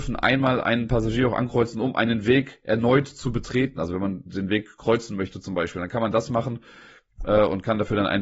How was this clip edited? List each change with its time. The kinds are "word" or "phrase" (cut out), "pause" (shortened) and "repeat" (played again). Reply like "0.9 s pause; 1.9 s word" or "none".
none